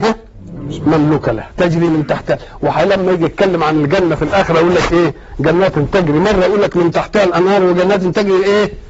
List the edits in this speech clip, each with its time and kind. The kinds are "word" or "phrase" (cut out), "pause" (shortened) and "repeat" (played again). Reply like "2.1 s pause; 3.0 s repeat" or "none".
none